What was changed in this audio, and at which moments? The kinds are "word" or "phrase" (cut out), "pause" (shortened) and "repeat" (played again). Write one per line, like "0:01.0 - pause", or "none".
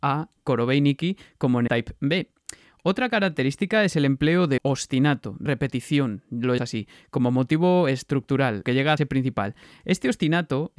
0:01.7 - word
0:04.6 - word
0:05.5 - word
0:06.6 - word
0:08.6 - word
0:09.0 - word

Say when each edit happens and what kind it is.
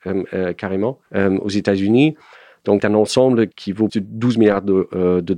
0:01.1 - pause
0:02.8 - word
0:03.5 - word
0:03.9 - word

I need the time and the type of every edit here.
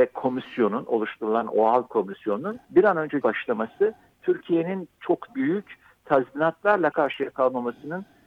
0:02.6 - pause
0:03.2 - word
0:05.3 - word
0:06.9 - word

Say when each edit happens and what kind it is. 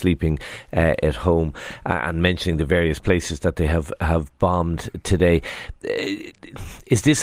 none

